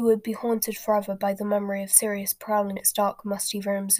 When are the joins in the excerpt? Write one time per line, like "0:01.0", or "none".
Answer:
0:02.8